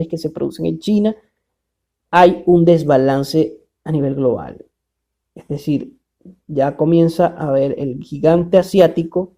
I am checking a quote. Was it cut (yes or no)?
no